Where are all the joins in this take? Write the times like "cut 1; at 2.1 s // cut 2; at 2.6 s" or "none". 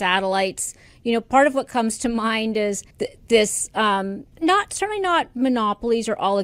cut 1; at 2.9 s // cut 2; at 4.3 s